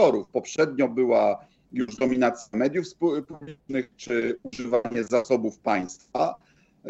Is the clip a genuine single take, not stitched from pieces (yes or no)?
yes